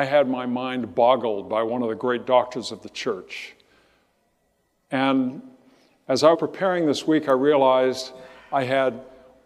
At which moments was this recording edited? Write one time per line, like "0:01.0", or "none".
0:06.3